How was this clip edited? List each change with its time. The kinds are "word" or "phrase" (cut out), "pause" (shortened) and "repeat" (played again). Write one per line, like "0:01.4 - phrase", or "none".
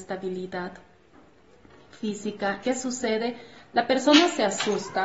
0:02.6 - word